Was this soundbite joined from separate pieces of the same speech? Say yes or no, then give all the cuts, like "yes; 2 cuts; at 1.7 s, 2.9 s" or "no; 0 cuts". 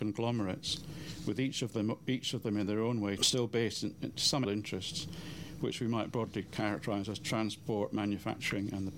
yes; 2 cuts; at 3.2 s, 4.4 s